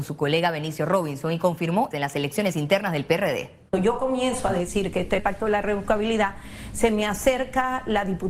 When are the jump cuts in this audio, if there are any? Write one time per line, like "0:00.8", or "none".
0:01.9
0:03.7
0:05.2